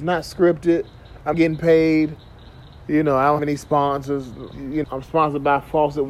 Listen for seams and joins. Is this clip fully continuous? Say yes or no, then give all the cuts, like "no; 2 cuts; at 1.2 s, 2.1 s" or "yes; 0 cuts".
no; 4 cuts; at 1.3 s, 3.4 s, 4.5 s, 4.8 s